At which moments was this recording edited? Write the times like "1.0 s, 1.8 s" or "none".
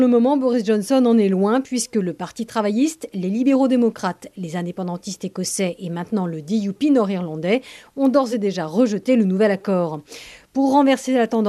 none